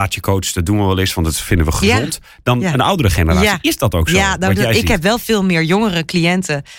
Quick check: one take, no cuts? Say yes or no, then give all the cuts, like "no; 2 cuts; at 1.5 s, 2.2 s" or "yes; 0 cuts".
yes; 0 cuts